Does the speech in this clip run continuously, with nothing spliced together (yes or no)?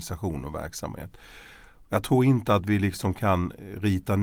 yes